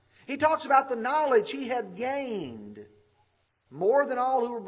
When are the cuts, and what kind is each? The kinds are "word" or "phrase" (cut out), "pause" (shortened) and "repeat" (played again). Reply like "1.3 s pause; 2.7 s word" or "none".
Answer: none